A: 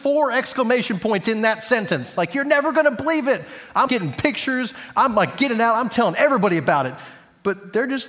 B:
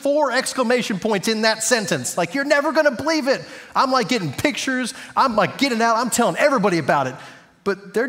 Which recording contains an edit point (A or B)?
A